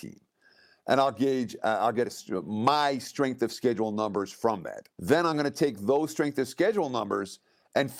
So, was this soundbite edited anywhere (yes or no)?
yes